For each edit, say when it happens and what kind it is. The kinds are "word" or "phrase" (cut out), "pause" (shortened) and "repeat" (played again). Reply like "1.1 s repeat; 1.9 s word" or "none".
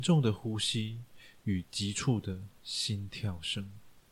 2.5 s pause